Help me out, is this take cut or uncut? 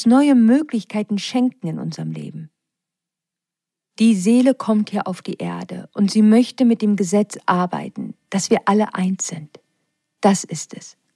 uncut